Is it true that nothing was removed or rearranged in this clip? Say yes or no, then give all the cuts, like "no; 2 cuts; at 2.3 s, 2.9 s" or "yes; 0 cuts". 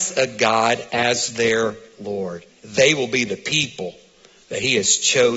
no; 1 cut; at 2.5 s